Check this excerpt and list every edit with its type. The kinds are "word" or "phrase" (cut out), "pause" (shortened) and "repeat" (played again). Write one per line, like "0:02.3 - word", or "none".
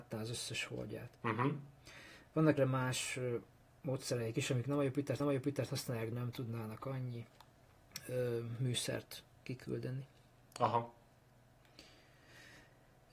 0:01.1 - pause
0:02.6 - word
0:05.2 - repeat
0:06.1 - word